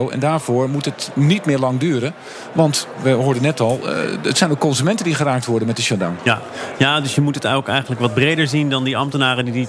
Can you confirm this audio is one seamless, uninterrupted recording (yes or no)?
yes